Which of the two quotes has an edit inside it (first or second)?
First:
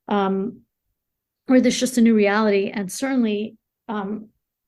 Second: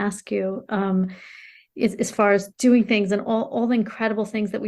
second